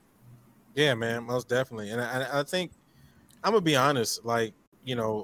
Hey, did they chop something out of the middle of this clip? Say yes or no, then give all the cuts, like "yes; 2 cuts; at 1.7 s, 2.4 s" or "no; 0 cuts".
no; 0 cuts